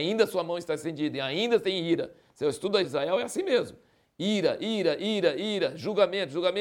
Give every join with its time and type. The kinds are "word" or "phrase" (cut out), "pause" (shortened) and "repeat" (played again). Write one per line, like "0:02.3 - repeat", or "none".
0:02.8 - word